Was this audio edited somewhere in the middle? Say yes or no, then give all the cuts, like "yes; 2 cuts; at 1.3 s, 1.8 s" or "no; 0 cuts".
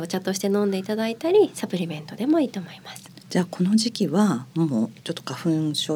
yes; 1 cut; at 5.0 s